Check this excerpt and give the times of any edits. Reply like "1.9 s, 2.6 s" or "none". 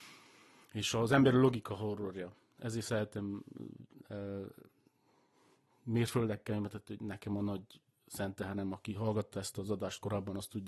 none